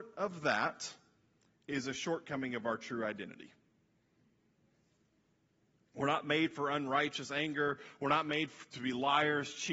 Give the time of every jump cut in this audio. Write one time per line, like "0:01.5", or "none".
none